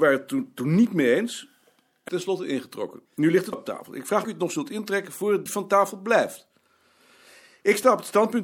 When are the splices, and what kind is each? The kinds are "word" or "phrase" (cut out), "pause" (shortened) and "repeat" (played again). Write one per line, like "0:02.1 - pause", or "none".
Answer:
0:02.1 - phrase
0:03.1 - pause
0:03.5 - word
0:04.2 - phrase
0:05.5 - word